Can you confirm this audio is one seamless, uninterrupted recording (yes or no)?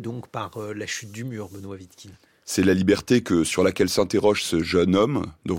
yes